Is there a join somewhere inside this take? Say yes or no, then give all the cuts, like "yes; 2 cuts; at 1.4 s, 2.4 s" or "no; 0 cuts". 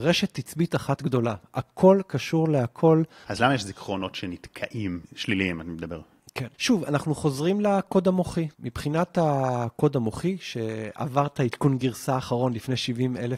yes; 3 cuts; at 5.0 s, 6.5 s, 8.5 s